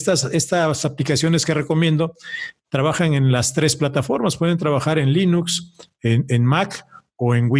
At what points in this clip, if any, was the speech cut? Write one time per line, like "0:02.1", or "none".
none